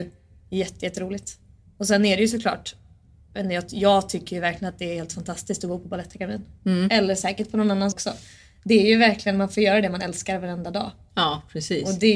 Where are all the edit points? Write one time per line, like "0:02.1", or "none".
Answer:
0:07.9